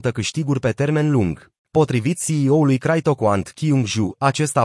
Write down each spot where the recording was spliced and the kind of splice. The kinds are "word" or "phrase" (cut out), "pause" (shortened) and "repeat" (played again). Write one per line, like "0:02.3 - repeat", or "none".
0:01.6 - pause